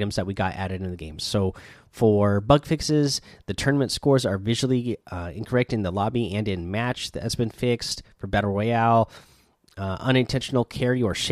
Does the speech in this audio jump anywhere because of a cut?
no; 0 cuts

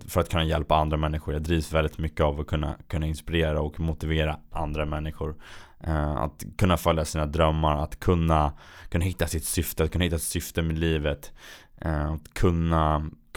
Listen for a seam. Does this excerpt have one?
no; 0 cuts

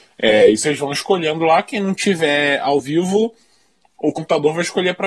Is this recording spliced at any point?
no; 0 cuts

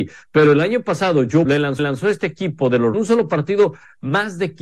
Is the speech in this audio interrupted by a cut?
yes; 3 cuts; at 1.4 s, 1.8 s, 2.9 s

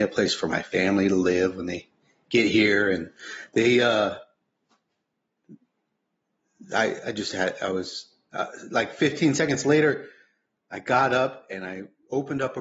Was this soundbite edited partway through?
no; 0 cuts

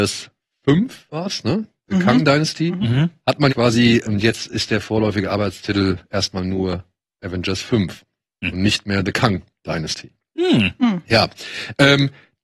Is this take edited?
yes; 2 cuts; at 3.5 s, 4.0 s

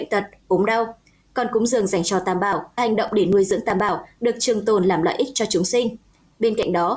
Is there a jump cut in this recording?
yes; 1 cut; at 2.8 s

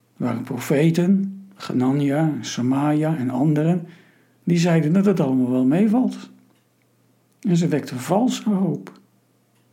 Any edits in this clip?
no; 0 cuts

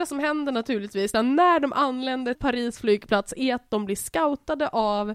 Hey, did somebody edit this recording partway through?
yes; 2 cuts; at 1.1 s, 2.3 s

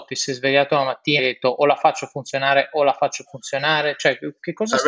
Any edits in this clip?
yes; 1 cut; at 1.2 s

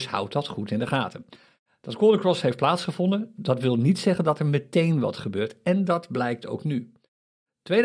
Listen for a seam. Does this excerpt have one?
no; 0 cuts

